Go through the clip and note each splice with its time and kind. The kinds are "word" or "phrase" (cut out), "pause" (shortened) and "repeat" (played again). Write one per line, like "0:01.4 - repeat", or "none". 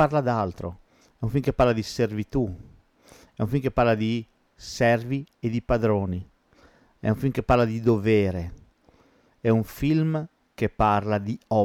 none